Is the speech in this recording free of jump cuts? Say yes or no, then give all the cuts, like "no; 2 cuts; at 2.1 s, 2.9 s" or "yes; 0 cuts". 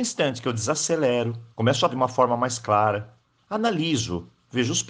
no; 3 cuts; at 1.5 s, 1.9 s, 3.2 s